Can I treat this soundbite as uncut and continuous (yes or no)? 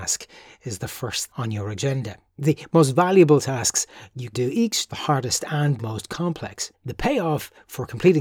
no